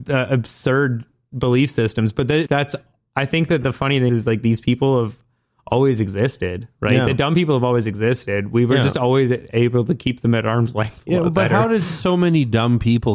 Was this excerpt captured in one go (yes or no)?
no